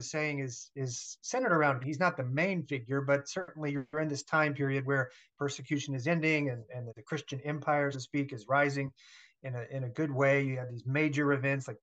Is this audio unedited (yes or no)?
no